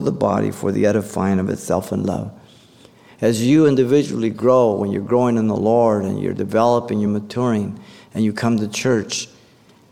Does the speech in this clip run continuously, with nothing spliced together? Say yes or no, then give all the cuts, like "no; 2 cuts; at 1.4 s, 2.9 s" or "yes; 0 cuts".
yes; 0 cuts